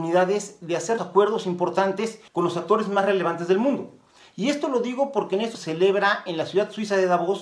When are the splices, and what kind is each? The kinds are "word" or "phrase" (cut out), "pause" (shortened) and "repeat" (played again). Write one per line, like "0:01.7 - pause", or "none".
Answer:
0:01.0 - word
0:02.3 - pause
0:05.5 - word